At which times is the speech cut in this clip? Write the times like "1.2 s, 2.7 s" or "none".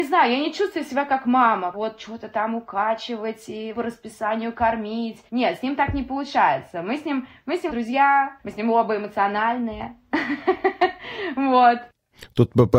1.7 s, 3.7 s, 5.3 s, 7.7 s, 8.4 s